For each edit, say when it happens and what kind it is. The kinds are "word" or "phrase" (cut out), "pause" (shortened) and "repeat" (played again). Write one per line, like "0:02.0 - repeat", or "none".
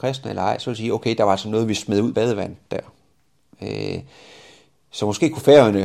0:02.1 - word